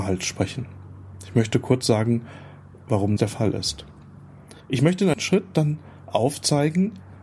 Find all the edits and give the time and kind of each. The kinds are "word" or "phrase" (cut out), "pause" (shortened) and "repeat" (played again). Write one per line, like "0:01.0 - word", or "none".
0:03.2 - word
0:04.6 - pause
0:05.1 - phrase

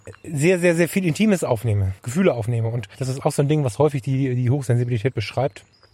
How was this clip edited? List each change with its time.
0:02.0 - pause

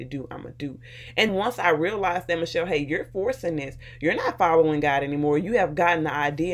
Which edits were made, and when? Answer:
0:01.3 - word

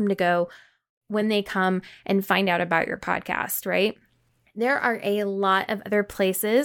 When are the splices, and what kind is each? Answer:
none

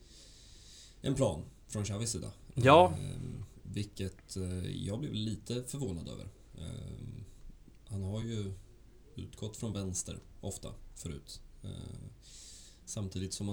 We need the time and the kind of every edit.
none

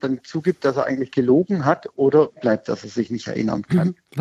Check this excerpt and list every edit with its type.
0:02.4 - word

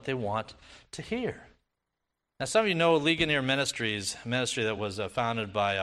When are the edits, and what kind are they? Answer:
none

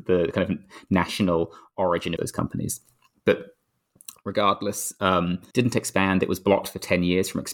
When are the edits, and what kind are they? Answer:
0:02.2 - phrase
0:05.5 - word

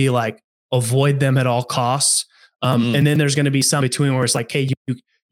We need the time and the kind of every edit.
0:03.8 - word

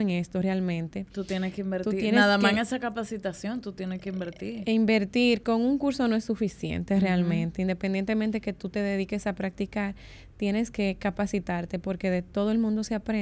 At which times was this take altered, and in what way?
none

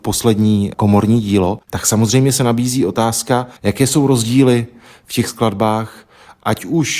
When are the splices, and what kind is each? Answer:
0:01.6 - pause
0:03.6 - pause

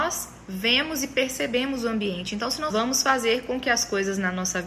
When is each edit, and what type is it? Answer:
0:02.7 - phrase

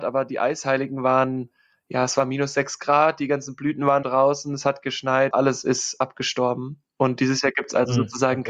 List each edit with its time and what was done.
0:04.0 - word
0:05.3 - word

